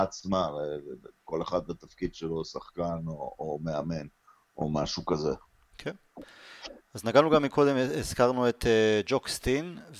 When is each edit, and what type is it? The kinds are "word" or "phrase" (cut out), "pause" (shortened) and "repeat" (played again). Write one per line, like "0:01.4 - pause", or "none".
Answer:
none